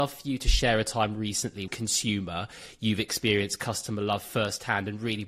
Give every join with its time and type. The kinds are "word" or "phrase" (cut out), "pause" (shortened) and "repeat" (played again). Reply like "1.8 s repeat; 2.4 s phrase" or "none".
1.7 s phrase